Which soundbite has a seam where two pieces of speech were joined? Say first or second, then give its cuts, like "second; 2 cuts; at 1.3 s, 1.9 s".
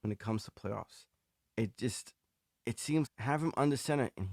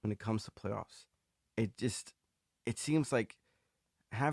first; 1 cut; at 3.1 s